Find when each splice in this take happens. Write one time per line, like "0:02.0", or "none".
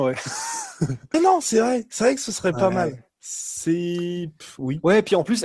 0:01.1
0:03.1